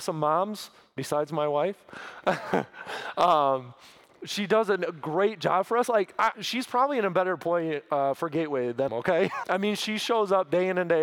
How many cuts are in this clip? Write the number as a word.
three